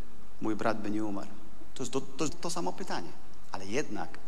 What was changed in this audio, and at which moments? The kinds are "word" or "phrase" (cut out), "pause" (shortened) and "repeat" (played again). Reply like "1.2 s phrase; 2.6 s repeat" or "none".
2.3 s word